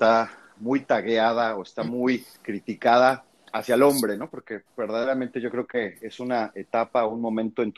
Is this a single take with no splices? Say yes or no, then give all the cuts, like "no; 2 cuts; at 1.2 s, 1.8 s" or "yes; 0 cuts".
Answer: no; 1 cut; at 2.4 s